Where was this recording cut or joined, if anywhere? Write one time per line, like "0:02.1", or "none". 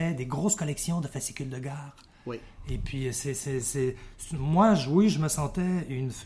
none